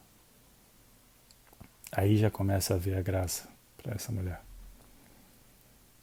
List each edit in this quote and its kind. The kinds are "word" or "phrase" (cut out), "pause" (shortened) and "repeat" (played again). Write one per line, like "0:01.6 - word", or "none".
0:03.6 - pause